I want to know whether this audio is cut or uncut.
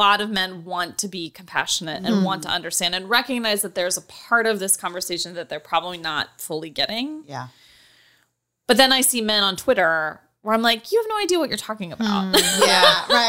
uncut